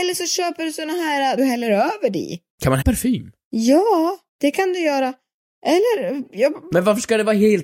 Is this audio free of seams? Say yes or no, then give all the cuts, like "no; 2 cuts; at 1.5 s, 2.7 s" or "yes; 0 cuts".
no; 4 cuts; at 1.4 s, 2.5 s, 2.8 s, 4.3 s